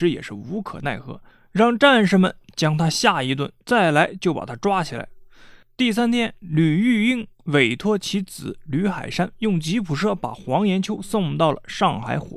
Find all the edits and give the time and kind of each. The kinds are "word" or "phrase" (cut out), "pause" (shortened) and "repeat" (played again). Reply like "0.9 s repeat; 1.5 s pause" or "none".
3.6 s pause; 7.3 s pause